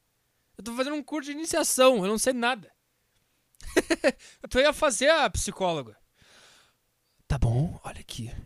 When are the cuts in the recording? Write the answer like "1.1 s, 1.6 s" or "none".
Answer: 4.4 s